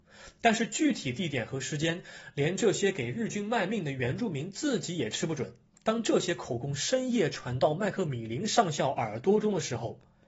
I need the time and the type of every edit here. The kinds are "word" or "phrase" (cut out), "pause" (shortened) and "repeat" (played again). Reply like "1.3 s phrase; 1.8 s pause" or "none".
5.7 s pause